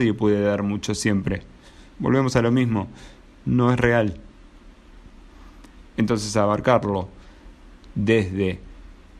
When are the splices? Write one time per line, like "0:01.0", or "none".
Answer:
none